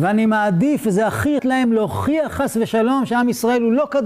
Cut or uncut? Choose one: cut